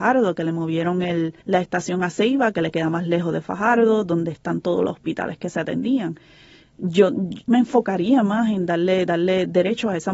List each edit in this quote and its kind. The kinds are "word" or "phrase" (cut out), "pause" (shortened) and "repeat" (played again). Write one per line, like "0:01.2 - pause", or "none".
0:01.4 - pause
0:07.5 - word
0:09.1 - repeat